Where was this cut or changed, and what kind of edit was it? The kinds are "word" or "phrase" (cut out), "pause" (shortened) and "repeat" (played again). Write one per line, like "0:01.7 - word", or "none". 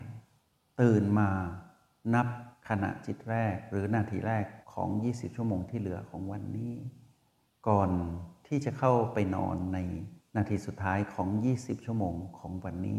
0:04.6 - pause